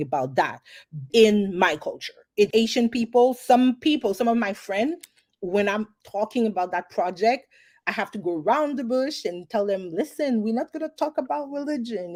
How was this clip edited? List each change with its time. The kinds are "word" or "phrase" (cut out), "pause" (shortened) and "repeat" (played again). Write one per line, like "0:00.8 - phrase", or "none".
0:01.1 - word
0:02.5 - word

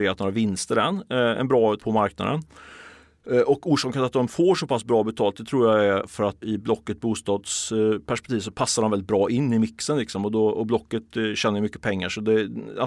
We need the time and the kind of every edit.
0:01.8 - word
0:06.4 - word

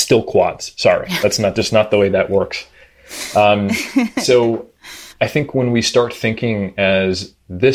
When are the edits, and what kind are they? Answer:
0:05.1 - pause

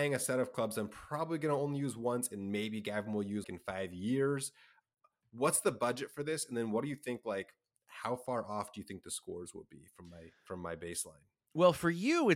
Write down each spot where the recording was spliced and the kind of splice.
0:03.4 - word

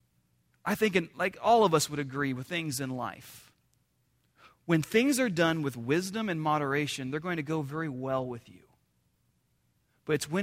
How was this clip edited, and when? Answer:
0:02.5 - word

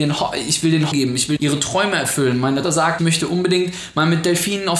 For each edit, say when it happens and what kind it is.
0:00.9 - word
0:01.4 - word
0:02.6 - word
0:03.0 - word

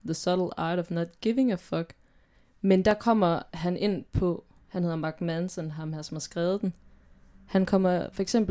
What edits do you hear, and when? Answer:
none

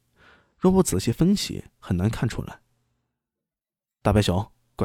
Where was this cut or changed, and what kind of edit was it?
none

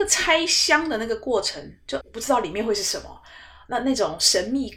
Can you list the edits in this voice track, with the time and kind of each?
0:02.0 - word

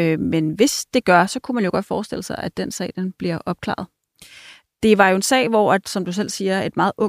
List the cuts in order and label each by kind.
none

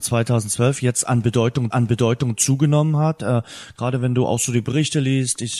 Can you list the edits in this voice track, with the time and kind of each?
0:01.7 - repeat

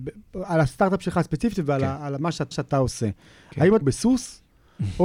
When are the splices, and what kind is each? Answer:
0:02.5 - repeat
0:03.8 - phrase

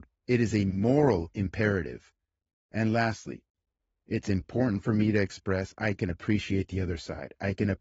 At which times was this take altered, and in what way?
none

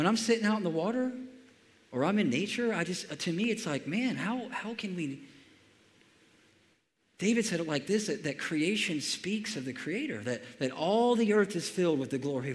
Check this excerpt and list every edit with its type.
none

